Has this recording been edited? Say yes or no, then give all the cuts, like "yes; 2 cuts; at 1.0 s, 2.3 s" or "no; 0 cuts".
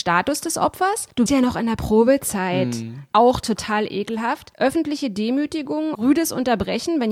yes; 2 cuts; at 1.3 s, 5.9 s